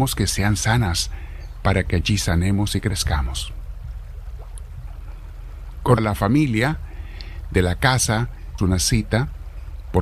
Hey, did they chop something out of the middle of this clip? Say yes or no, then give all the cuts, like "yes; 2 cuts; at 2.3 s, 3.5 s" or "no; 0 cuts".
yes; 2 cuts; at 6.0 s, 8.6 s